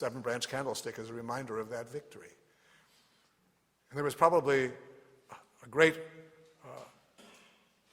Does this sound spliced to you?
no; 0 cuts

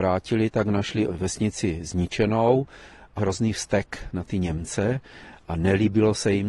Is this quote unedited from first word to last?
no; 1 cut; at 3.2 s

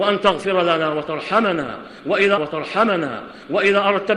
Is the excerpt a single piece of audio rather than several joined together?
no; 1 cut; at 2.4 s

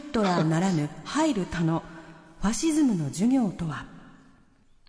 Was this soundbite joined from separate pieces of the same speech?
no; 0 cuts

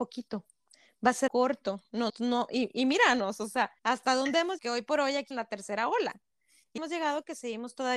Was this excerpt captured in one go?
no; 6 cuts; at 1.3 s, 2.1 s, 3.8 s, 4.6 s, 5.3 s, 6.8 s

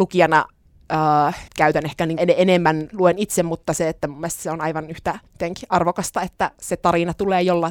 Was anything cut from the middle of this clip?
yes; 4 cuts; at 1.5 s, 2.2 s, 2.9 s, 5.3 s

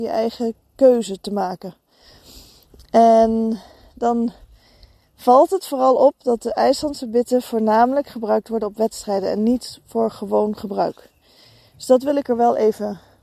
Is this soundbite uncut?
yes; 0 cuts

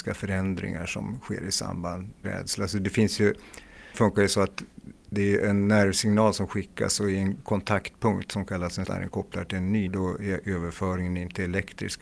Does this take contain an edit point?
yes; 4 cuts; at 2.2 s, 3.9 s, 8.8 s, 9.9 s

